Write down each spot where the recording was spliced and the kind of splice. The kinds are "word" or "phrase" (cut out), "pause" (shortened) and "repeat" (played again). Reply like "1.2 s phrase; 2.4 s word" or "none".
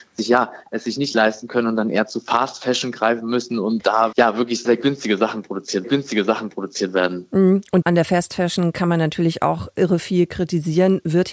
4.1 s word; 4.7 s word; 5.8 s repeat; 7.8 s word